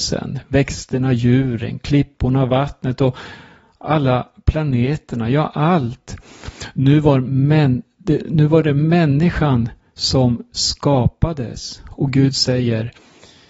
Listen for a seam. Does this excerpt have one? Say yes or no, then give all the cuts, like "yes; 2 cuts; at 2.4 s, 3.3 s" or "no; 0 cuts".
no; 0 cuts